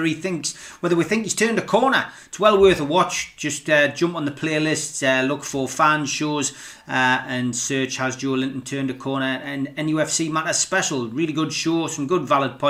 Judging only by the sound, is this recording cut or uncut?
uncut